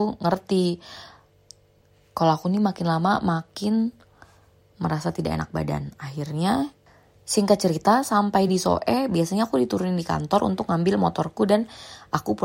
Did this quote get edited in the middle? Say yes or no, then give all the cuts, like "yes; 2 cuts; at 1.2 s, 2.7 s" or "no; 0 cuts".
no; 0 cuts